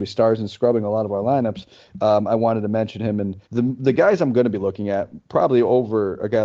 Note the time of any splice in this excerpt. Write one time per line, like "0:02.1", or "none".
0:03.5

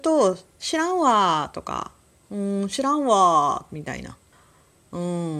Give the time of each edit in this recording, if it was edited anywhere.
0:04.3

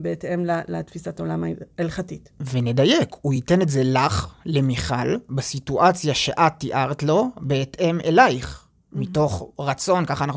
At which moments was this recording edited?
none

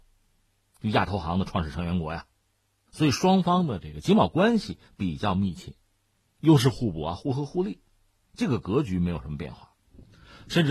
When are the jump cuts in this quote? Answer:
none

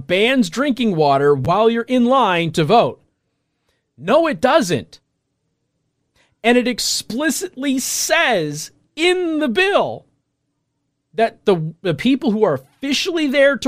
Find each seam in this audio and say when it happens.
none

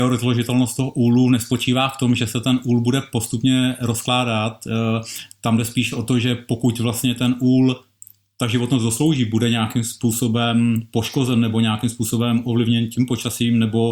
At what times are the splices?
none

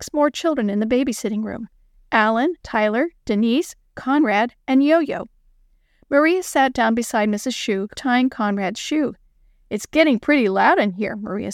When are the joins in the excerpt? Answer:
0:02.6
0:07.9

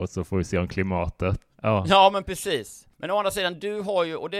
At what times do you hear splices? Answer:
0:01.5
0:02.9

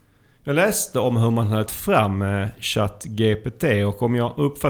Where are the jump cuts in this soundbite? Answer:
0:01.7

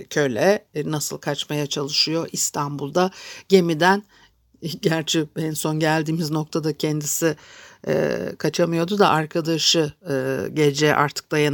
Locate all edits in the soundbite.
none

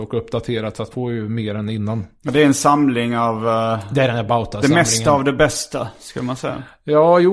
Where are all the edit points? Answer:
0:00.9

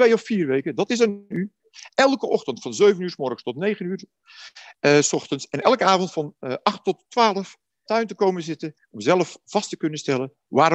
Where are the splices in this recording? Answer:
0:07.9

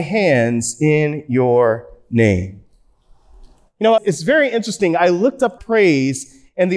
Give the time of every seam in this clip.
0:04.0
0:05.6

